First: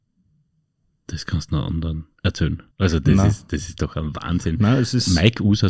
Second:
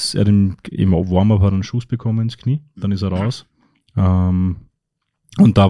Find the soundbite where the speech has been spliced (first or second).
first